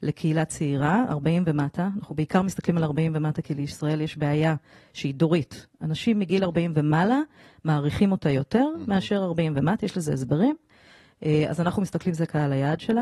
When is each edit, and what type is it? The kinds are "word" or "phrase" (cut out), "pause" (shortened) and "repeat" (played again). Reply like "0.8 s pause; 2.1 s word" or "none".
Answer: none